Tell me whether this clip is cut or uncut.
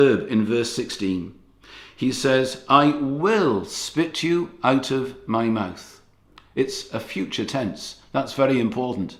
uncut